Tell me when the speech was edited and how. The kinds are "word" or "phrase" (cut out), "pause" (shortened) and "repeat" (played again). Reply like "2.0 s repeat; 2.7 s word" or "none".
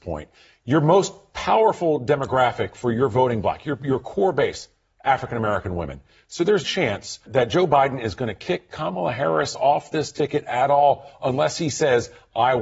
6.6 s word; 7.3 s word

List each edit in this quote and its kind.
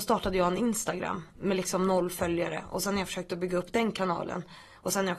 none

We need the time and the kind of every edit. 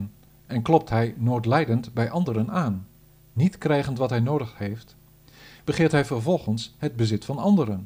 3.0 s pause

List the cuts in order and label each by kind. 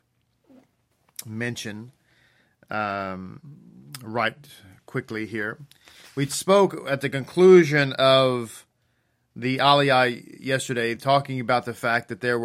none

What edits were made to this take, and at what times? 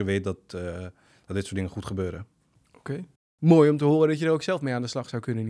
none

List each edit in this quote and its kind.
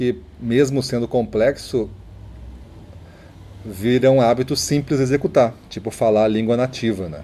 none

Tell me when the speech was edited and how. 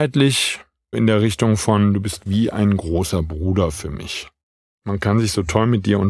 0.9 s word

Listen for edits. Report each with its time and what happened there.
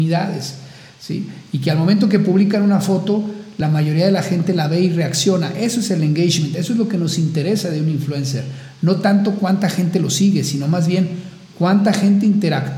none

